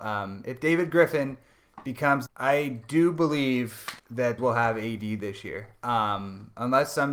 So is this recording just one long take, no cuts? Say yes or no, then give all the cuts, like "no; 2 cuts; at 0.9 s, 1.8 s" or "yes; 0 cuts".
no; 3 cuts; at 2.3 s, 4.0 s, 4.4 s